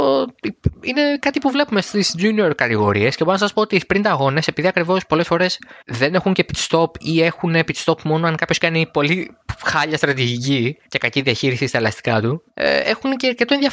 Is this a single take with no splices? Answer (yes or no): no